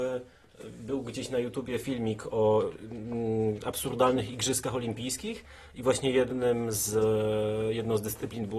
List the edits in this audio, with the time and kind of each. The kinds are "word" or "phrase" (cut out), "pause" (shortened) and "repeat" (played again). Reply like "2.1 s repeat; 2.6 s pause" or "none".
none